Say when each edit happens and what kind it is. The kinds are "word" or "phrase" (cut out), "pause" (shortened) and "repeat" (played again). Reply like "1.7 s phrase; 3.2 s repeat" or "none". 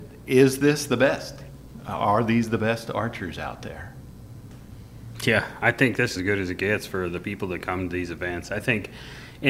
6.2 s word

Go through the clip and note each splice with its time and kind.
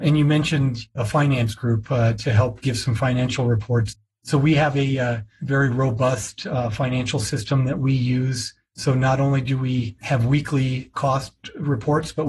none

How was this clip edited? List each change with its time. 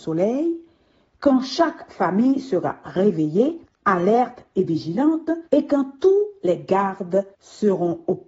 3.7 s pause; 5.5 s pause; 7.3 s pause

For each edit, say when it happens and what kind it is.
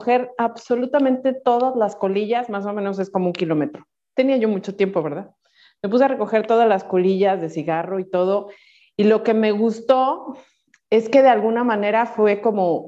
none

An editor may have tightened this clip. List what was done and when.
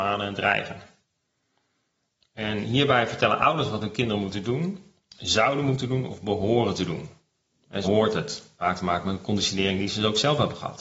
7.8 s word; 8.6 s word

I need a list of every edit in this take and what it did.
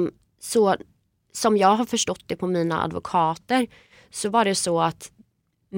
none

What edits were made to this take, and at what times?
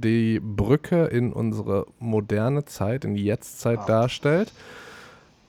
none

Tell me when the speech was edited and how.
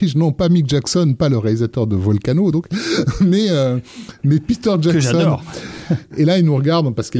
none

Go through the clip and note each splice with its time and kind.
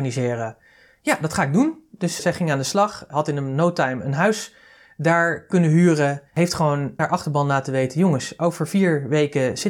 2.2 s word; 6.3 s pause; 7.0 s word

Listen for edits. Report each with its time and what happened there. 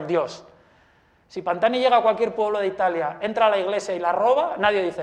none

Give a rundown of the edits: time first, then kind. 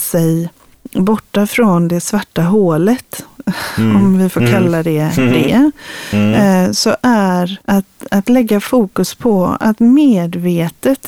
7.6 s pause

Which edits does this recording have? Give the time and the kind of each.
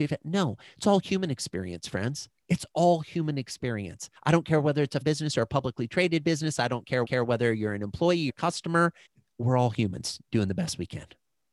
2.4 s pause; 4.2 s pause; 5.0 s word; 7.0 s repeat; 8.3 s word; 9.1 s pause

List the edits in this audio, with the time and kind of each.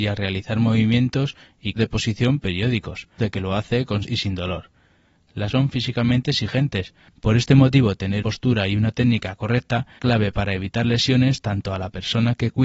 1.8 s word; 3.2 s word; 4.0 s word; 5.5 s word; 8.2 s word; 10.0 s word

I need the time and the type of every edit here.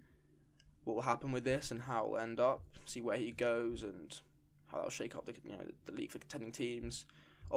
none

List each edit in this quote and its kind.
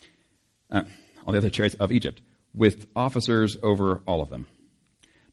none

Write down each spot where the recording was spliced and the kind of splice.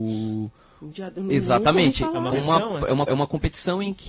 0.9 s word; 2.3 s word; 3.1 s repeat

